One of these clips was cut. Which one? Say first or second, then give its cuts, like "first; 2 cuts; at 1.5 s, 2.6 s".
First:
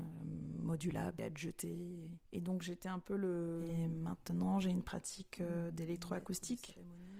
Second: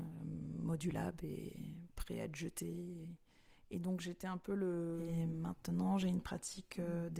first; 2 cuts; at 1.2 s, 2.2 s